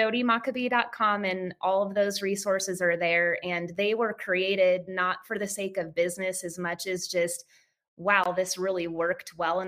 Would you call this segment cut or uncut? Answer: uncut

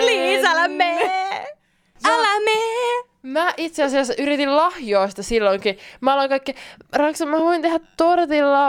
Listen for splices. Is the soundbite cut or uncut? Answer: uncut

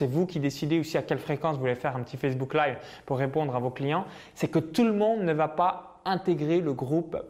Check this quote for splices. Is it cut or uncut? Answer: uncut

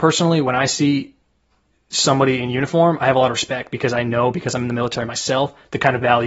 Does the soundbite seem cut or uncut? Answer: uncut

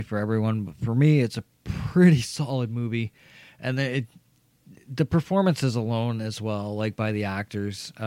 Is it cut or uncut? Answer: uncut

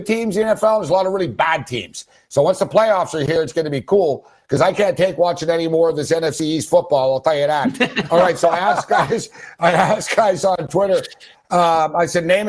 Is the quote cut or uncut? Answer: uncut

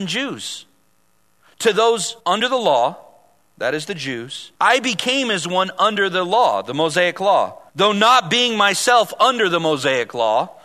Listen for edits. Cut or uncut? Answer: cut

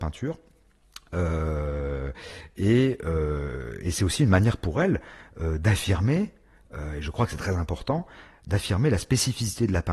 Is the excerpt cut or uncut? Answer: uncut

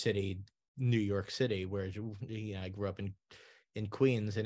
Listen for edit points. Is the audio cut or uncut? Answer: uncut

